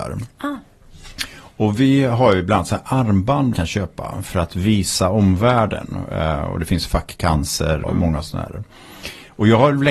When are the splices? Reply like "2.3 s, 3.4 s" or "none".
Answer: 3.5 s, 7.8 s